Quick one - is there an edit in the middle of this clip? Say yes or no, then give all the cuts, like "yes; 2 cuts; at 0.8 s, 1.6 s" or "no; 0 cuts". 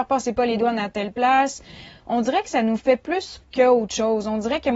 yes; 1 cut; at 3.4 s